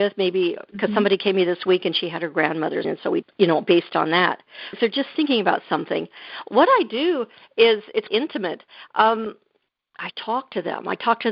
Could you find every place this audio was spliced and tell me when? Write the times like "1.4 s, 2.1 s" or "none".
2.8 s, 3.2 s, 4.7 s, 8.1 s, 10.1 s